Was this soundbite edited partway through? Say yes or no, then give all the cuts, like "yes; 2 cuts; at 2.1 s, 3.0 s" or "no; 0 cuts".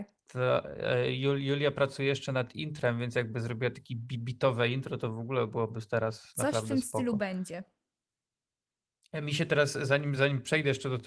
no; 0 cuts